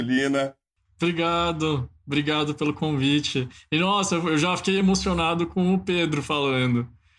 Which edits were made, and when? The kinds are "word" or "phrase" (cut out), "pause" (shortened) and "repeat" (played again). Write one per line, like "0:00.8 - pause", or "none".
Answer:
none